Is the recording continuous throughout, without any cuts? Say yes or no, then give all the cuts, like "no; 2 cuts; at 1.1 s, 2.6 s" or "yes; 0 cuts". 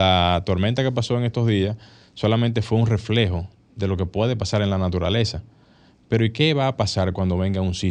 yes; 0 cuts